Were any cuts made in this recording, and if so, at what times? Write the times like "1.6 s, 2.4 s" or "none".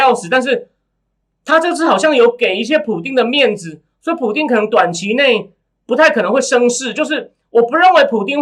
none

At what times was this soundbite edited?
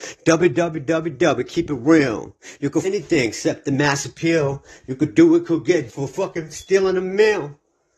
2.8 s, 5.9 s

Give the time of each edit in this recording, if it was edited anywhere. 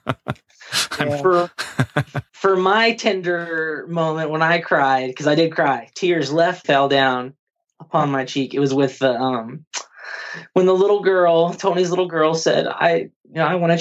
2.3 s, 6.6 s

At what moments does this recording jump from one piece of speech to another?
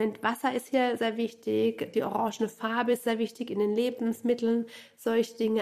1.0 s, 3.0 s

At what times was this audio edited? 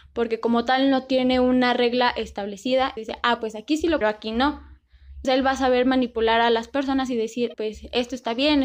3.0 s, 4.0 s, 5.2 s, 7.5 s

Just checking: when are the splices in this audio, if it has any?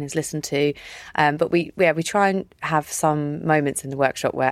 none

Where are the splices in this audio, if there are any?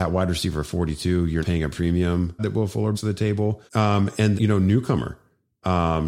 1.4 s, 2.4 s, 2.9 s, 3.7 s, 4.3 s

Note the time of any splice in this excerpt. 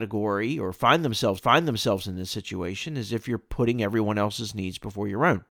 1.4 s

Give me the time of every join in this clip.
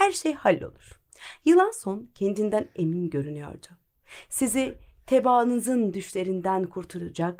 none

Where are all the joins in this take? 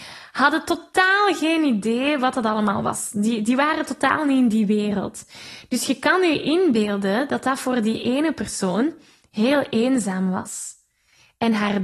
none

